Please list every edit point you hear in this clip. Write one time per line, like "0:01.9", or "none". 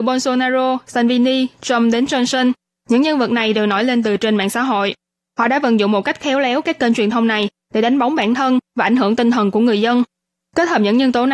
none